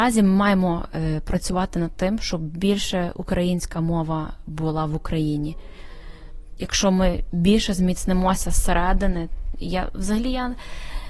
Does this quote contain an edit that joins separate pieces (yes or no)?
no